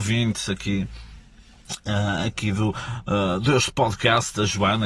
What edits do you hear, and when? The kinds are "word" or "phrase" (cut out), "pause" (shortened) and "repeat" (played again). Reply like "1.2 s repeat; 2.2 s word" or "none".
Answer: none